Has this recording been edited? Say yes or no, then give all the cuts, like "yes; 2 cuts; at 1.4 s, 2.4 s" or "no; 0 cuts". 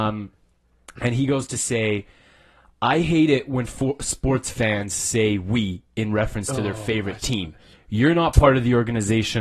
no; 0 cuts